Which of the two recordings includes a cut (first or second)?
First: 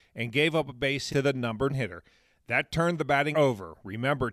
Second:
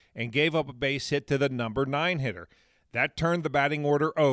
first